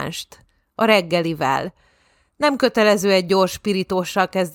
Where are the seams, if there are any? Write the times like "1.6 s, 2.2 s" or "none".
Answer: none